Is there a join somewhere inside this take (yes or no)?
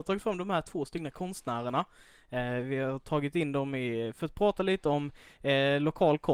no